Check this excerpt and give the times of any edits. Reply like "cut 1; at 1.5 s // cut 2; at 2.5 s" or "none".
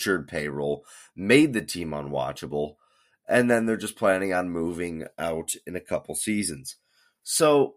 none